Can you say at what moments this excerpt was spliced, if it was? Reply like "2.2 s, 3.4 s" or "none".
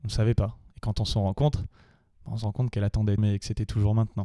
3.2 s